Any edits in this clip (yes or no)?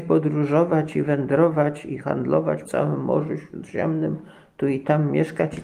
yes